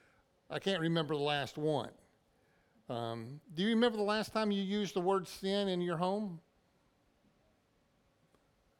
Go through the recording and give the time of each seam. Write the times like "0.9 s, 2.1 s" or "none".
3.4 s

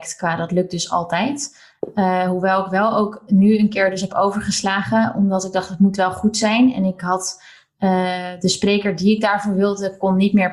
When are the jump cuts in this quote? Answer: none

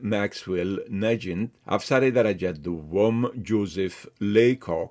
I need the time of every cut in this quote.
1.6 s

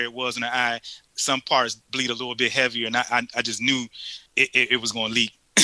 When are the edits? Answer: 4.3 s

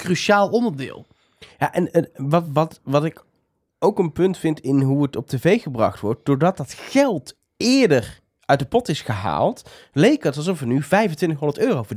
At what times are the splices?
none

